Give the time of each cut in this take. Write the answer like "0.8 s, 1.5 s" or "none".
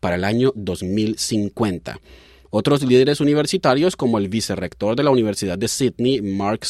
none